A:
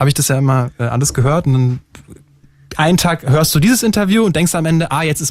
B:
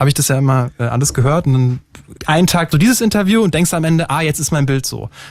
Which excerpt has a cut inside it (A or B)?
B